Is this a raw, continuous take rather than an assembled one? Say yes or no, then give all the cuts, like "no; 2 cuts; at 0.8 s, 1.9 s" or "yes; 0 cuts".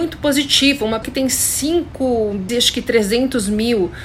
no; 2 cuts; at 1.0 s, 2.5 s